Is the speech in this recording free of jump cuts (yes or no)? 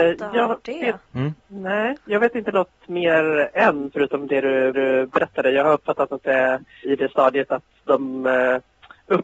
no